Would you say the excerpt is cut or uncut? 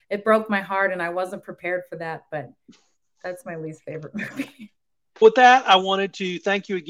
uncut